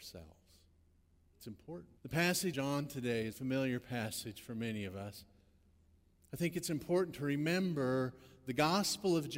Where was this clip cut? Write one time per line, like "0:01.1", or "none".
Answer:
0:02.0
0:02.5
0:03.3